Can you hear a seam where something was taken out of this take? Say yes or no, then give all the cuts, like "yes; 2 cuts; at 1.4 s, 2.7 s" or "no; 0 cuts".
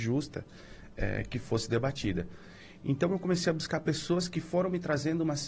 no; 0 cuts